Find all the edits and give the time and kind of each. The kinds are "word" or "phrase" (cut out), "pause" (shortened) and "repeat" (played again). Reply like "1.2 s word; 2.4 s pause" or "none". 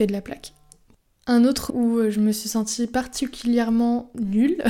1.7 s word